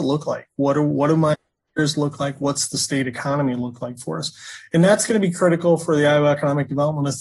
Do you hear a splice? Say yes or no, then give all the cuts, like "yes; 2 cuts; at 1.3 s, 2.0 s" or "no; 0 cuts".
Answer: no; 0 cuts